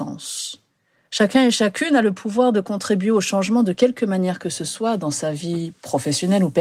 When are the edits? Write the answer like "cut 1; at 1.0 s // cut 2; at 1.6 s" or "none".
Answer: none